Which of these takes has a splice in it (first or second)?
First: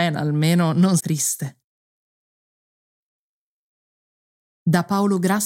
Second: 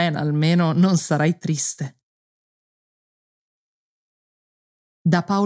first